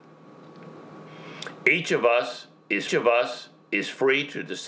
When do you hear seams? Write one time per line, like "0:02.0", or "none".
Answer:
0:02.9